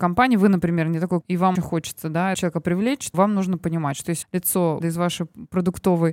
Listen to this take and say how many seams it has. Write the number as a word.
six